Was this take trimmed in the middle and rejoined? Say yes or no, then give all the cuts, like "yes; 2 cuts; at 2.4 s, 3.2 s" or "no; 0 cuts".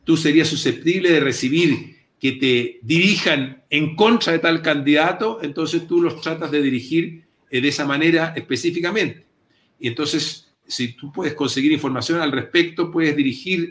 no; 0 cuts